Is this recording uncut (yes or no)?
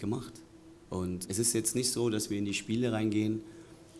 no